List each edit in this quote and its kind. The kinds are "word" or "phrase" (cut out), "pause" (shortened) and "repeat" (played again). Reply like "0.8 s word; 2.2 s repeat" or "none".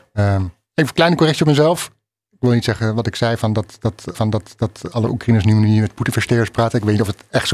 4.1 s repeat